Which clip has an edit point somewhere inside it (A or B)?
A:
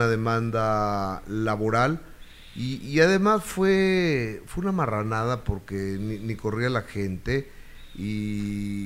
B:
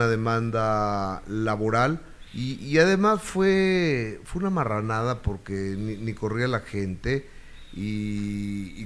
B